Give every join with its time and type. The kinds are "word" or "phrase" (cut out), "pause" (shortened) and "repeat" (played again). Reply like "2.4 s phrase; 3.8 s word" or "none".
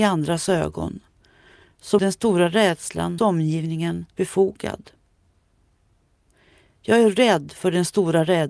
2.0 s word; 3.2 s word; 4.1 s word